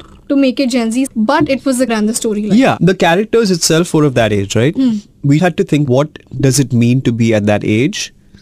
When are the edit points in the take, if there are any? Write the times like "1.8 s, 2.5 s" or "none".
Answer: 1.1 s, 1.9 s, 4.7 s, 5.4 s, 5.9 s